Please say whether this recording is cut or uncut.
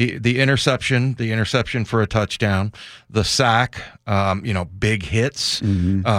uncut